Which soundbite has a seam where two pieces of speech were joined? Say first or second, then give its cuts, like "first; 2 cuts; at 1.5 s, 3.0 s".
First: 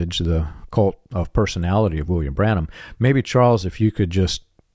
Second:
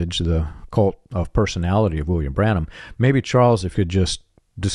second; 1 cut; at 3.7 s